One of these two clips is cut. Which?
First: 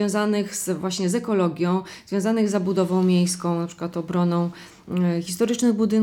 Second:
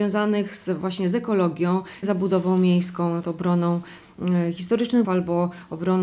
second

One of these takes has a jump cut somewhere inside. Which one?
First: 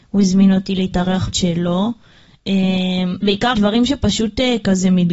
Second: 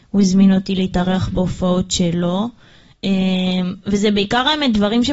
first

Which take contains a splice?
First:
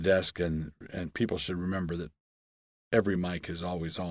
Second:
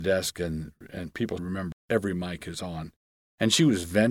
second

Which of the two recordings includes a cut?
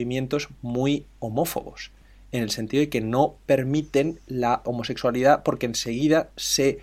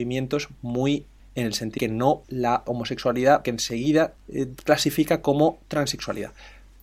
second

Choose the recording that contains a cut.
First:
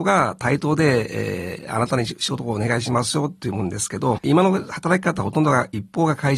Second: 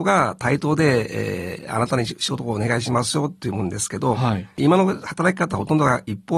first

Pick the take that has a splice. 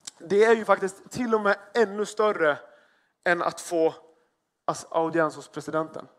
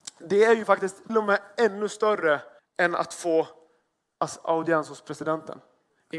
second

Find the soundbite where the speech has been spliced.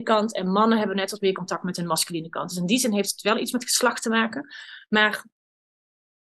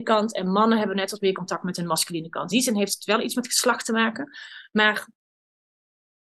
second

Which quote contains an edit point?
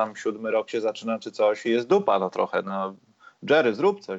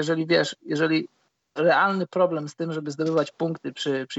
second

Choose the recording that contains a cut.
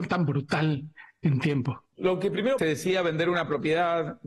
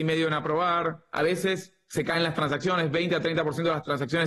first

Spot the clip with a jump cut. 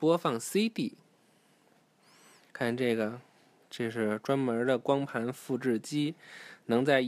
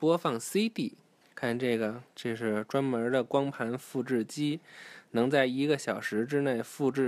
second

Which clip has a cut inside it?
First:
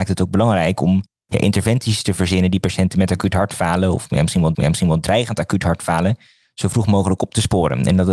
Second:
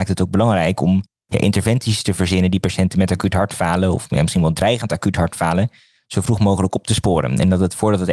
first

